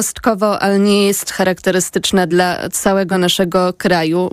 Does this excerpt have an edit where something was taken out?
no; 0 cuts

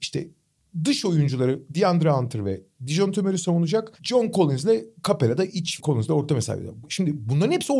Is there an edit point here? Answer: yes; 2 cuts; at 3.9 s, 5.8 s

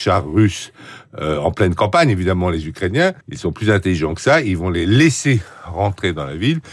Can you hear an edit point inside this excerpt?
yes; 1 cut; at 3.2 s

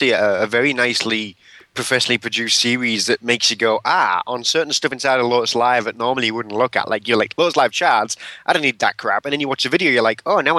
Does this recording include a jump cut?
no; 0 cuts

